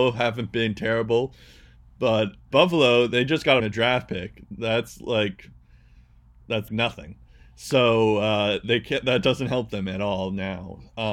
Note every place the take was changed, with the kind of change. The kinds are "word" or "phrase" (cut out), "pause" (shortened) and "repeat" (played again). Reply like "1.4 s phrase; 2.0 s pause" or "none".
2.5 s word; 3.6 s phrase; 6.7 s word